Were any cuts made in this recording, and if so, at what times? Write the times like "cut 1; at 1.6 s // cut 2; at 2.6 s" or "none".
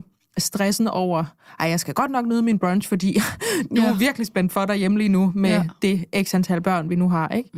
none